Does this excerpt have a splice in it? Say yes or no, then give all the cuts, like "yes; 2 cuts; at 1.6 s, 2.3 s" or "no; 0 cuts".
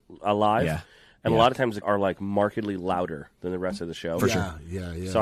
yes; 1 cut; at 1.8 s